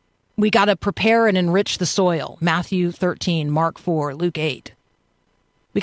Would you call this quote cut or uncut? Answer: uncut